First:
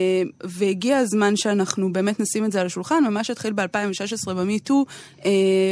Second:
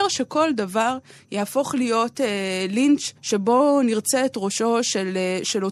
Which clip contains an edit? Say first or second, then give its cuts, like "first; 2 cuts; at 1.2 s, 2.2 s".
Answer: second; 1 cut; at 3.2 s